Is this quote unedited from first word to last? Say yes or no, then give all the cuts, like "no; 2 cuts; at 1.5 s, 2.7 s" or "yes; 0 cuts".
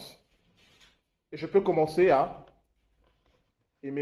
yes; 0 cuts